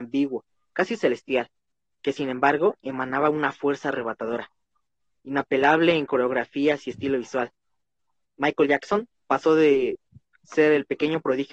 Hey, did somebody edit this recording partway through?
no; 0 cuts

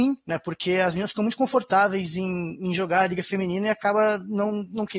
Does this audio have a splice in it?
no; 0 cuts

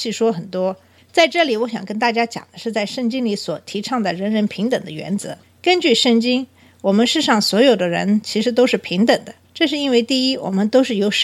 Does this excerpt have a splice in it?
yes; 1 cut; at 9.4 s

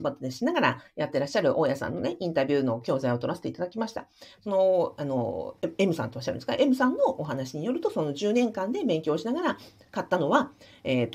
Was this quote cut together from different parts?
no; 0 cuts

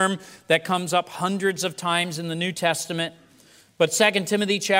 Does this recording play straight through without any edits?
yes; 0 cuts

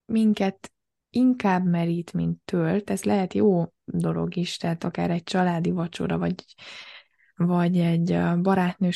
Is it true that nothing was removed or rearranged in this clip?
yes; 0 cuts

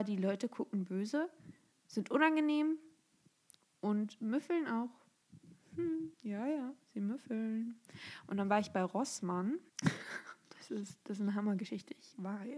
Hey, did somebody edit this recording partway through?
yes; 2 cuts; at 6.1 s, 9.7 s

